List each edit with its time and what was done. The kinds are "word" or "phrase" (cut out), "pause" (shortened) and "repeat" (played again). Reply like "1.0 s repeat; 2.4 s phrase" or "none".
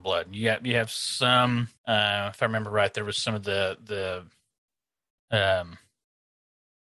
1.8 s pause